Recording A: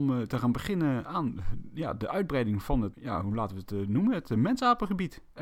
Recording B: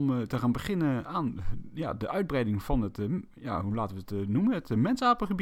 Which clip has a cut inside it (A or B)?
A